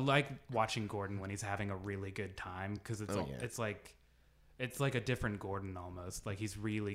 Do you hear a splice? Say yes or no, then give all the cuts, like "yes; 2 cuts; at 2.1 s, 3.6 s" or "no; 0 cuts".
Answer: no; 0 cuts